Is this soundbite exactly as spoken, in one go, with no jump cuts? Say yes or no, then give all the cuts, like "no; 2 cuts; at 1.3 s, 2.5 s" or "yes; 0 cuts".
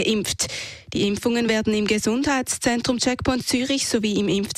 yes; 0 cuts